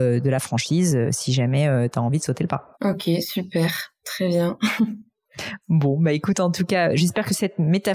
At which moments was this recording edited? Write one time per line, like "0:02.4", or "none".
0:02.7